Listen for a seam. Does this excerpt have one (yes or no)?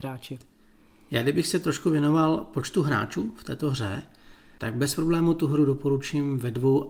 no